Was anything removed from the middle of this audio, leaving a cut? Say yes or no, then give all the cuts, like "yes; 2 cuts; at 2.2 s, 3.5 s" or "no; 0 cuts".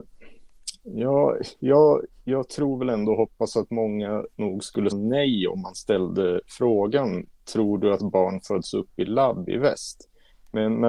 yes; 1 cut; at 4.9 s